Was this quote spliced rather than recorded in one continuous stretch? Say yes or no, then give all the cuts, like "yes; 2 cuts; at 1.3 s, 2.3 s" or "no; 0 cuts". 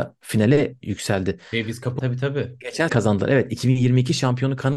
yes; 2 cuts; at 2.0 s, 2.9 s